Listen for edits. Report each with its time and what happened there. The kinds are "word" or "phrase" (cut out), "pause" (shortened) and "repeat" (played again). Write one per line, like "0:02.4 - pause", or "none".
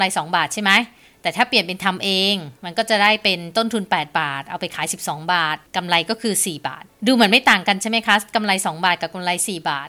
0:02.6 - pause
0:05.7 - pause
0:06.9 - pause